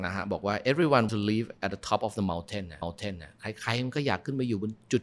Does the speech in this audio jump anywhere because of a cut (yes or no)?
yes